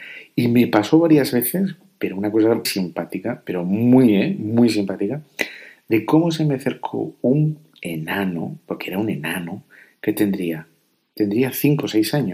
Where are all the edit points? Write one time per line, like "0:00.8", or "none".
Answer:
0:02.6